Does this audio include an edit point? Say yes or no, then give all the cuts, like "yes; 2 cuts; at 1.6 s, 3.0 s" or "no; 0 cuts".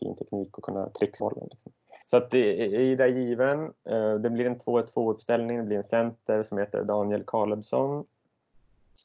yes; 2 cuts; at 1.2 s, 2.0 s